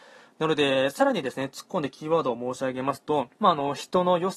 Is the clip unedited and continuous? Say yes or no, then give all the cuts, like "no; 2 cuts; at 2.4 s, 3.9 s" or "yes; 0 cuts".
no; 1 cut; at 3.3 s